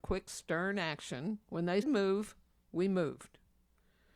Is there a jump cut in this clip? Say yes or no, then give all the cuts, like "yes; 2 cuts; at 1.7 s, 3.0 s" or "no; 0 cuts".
yes; 2 cuts; at 1.4 s, 1.8 s